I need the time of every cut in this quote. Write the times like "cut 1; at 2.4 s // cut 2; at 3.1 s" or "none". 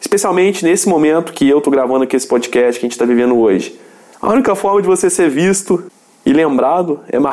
none